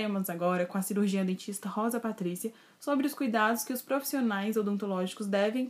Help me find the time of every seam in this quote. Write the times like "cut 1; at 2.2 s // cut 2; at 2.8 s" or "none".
none